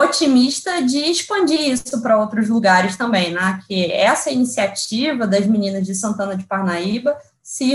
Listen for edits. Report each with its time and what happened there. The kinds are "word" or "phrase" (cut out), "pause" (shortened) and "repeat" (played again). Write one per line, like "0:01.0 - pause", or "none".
none